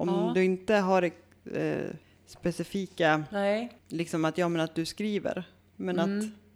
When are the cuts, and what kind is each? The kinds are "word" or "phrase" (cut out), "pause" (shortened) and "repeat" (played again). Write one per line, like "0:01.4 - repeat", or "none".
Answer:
0:02.0 - pause
0:03.8 - pause